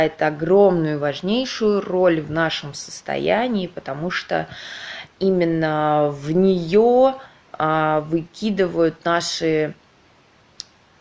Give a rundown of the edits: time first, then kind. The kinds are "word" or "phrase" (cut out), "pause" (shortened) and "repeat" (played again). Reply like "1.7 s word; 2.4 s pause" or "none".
none